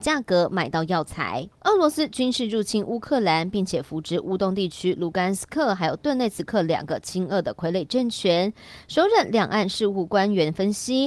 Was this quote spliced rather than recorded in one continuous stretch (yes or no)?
yes